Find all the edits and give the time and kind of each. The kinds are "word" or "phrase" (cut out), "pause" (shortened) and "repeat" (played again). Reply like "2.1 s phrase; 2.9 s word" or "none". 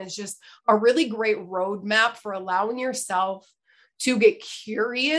none

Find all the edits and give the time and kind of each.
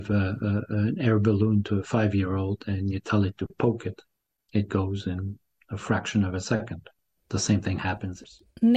none

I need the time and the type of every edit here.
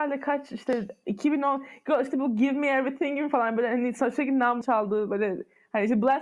4.6 s phrase

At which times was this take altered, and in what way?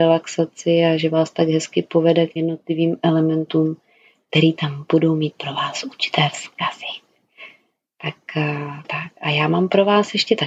2.4 s word; 8.8 s word

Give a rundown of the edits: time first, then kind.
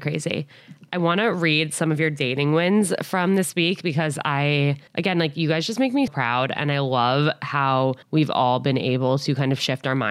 4.9 s pause; 6.1 s word; 8.0 s pause

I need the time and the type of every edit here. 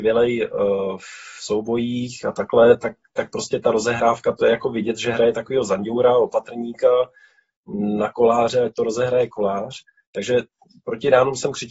none

